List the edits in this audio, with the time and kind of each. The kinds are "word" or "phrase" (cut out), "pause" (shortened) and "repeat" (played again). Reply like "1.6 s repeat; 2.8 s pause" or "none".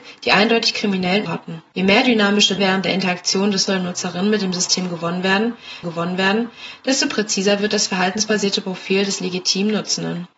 1.3 s word; 1.7 s pause; 2.6 s word; 3.7 s word; 5.8 s repeat